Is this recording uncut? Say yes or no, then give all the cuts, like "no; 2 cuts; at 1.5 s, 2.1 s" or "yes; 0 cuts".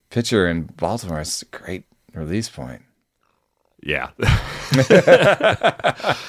yes; 0 cuts